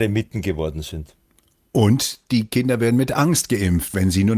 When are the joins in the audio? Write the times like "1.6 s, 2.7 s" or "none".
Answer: none